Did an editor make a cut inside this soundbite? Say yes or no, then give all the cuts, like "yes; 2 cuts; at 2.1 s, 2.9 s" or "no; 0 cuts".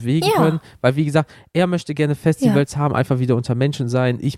no; 0 cuts